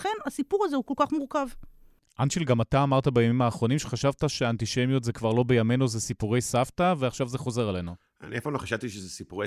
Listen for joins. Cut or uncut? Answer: uncut